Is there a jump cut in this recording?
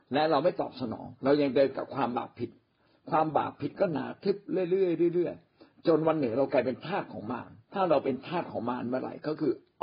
yes; 2 cuts; at 1.2 s, 7.6 s

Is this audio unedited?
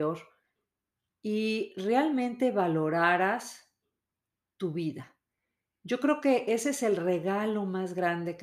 yes; 0 cuts

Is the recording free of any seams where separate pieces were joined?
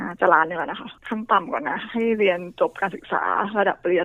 no; 1 cut; at 1.0 s

